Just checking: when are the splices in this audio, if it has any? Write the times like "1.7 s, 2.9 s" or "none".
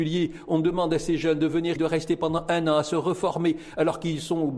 1.8 s